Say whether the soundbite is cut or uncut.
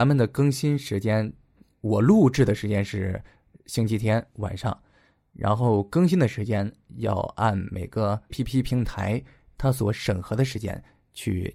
cut